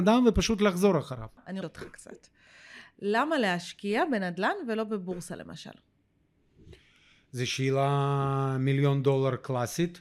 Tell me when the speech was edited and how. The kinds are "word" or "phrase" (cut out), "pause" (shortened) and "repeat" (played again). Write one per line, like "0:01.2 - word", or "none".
0:01.6 - phrase